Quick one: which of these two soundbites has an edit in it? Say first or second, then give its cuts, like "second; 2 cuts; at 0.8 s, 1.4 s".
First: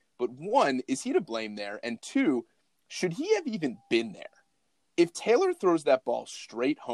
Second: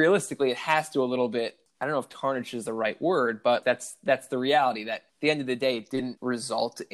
second; 2 cuts; at 3.6 s, 5.1 s